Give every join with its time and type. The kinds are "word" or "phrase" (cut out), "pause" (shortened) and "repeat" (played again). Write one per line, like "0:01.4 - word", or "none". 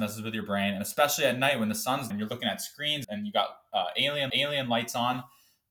0:02.1 - word
0:03.0 - word
0:04.3 - repeat

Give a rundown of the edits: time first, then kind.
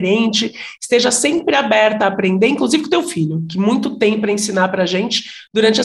none

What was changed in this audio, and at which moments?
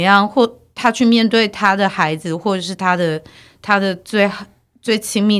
none

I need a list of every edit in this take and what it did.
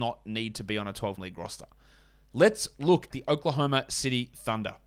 0:01.2 - word
0:03.1 - word

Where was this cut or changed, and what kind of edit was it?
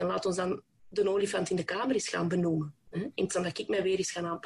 0:03.3 - word

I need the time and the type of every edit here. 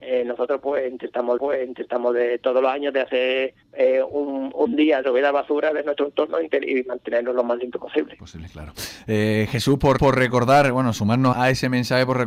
0:01.4 - repeat
0:03.6 - pause
0:05.0 - word
0:10.0 - repeat
0:11.3 - word

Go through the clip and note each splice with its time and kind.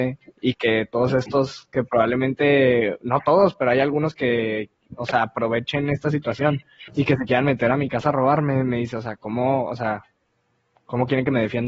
0:06.9 - pause

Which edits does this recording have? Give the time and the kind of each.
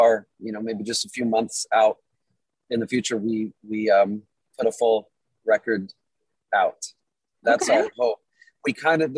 none

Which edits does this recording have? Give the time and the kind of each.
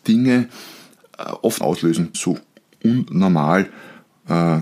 0:01.6 - phrase
0:02.1 - phrase

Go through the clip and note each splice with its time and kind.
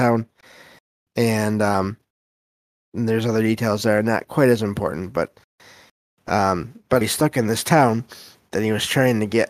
0:02.8 - word
0:07.0 - word

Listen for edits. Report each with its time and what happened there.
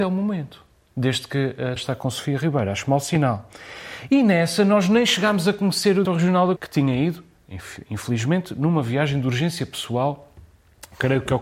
0:01.8 - word
0:06.0 - word
0:06.6 - word

